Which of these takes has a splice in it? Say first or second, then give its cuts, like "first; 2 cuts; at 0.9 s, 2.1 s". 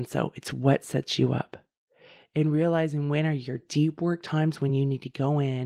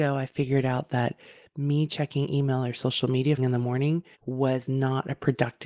second; 2 cuts; at 3.4 s, 4.1 s